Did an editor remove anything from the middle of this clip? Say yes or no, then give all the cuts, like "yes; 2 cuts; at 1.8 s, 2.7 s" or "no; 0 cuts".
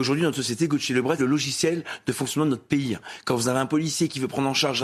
yes; 1 cut; at 1.2 s